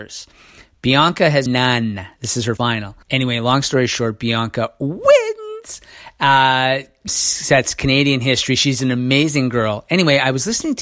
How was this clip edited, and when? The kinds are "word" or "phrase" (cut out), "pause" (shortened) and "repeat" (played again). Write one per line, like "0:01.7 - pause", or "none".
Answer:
0:01.5 - word
0:02.6 - word
0:03.0 - pause
0:07.1 - word